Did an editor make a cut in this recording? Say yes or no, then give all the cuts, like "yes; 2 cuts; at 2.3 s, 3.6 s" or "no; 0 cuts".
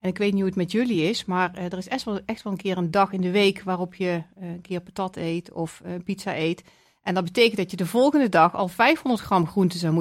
no; 0 cuts